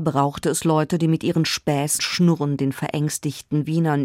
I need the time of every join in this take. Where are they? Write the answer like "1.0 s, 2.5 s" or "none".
2.0 s